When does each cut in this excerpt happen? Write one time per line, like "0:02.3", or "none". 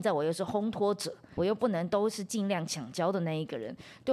0:01.4